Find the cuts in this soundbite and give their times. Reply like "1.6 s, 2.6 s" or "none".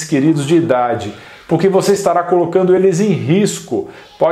none